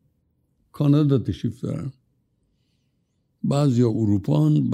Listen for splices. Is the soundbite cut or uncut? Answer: uncut